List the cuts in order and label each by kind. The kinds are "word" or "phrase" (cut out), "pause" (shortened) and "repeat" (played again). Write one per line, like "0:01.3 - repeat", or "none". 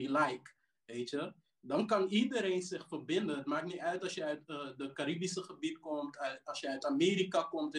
none

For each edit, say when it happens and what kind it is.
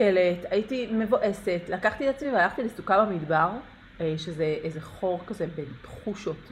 none

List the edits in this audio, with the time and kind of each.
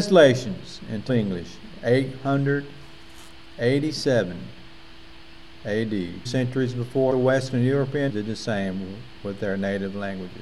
0:01.1 - word
0:06.3 - word
0:07.1 - word
0:08.1 - word

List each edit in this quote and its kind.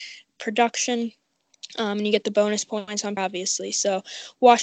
0:03.2 - word

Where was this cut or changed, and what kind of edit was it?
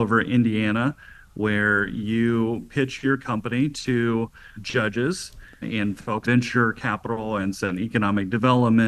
0:04.6 - word
0:05.6 - word
0:06.2 - word
0:07.5 - word

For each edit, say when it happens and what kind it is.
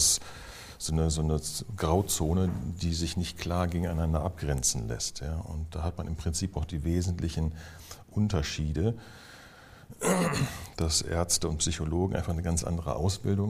none

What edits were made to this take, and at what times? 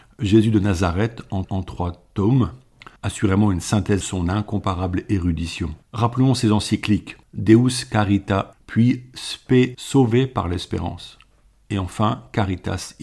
0:01.4 - repeat
0:03.0 - pause
0:04.0 - phrase
0:05.8 - pause
0:07.2 - pause
0:08.5 - phrase
0:09.7 - word

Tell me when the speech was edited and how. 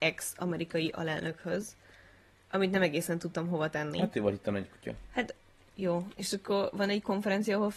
none

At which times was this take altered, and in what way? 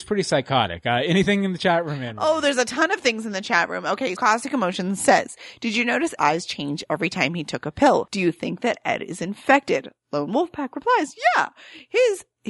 0:04.2 - word
0:06.2 - word

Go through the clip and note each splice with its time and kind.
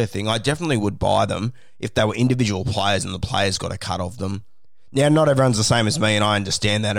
none

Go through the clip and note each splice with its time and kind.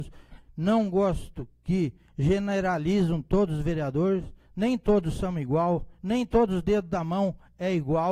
none

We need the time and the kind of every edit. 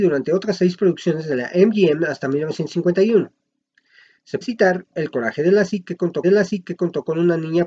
0:04.4 - word
0:06.2 - repeat

